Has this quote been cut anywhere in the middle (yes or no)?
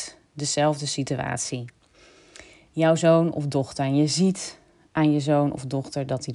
no